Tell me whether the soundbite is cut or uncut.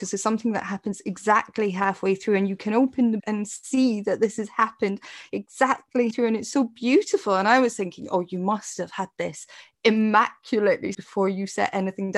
cut